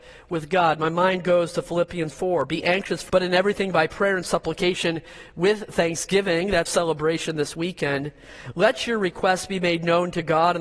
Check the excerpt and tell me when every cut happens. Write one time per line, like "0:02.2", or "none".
0:02.1
0:03.1
0:06.7